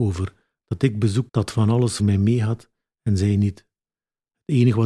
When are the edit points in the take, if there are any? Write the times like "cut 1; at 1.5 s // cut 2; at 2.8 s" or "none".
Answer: cut 1; at 1.3 s // cut 2; at 2.0 s